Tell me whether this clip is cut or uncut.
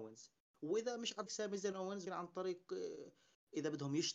cut